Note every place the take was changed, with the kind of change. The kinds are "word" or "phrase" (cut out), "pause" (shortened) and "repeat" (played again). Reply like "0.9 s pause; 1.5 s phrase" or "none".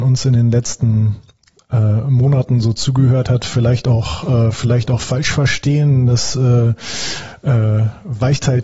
none